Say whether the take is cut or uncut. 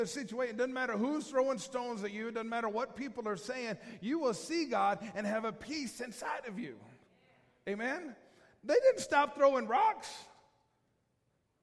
uncut